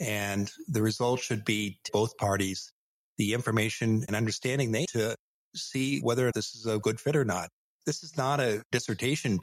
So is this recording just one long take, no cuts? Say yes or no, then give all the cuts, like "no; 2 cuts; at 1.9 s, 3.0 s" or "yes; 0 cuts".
no; 4 cuts; at 1.9 s, 4.1 s, 4.9 s, 6.3 s